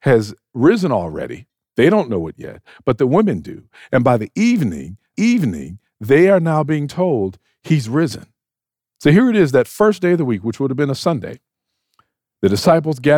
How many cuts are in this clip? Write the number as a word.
one